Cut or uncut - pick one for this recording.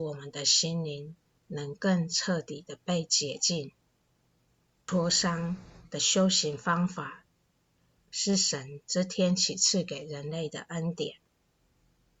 uncut